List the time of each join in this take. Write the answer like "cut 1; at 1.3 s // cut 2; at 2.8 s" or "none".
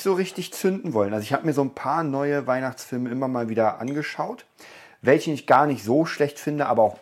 none